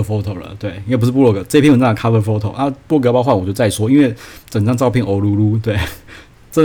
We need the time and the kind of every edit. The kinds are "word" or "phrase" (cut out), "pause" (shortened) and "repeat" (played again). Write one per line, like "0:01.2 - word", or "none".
none